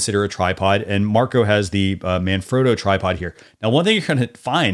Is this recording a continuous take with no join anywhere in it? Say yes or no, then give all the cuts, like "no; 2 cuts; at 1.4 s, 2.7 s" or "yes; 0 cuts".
yes; 0 cuts